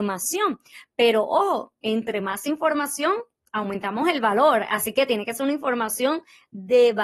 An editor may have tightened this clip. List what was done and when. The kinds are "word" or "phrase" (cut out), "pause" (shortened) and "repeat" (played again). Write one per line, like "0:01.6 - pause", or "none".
none